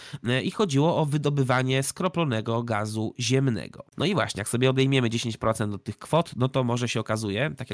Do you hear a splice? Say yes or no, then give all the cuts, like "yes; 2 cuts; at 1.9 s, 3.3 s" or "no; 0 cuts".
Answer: yes; 1 cut; at 3.9 s